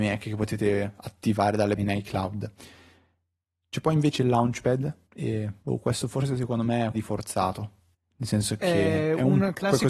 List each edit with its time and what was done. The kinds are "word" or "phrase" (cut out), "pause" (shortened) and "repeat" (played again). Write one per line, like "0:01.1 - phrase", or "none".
0:01.8 - phrase
0:05.0 - pause
0:05.6 - pause
0:06.9 - word
0:07.9 - pause